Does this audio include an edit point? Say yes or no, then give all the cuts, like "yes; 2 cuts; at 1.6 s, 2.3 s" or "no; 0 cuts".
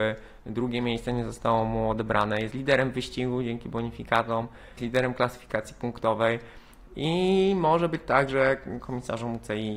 yes; 1 cut; at 4.8 s